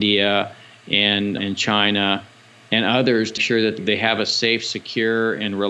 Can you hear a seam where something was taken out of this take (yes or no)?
yes